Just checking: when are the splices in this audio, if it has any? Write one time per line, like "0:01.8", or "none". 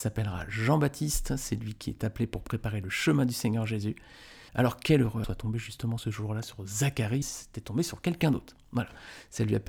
0:04.5
0:05.2
0:07.2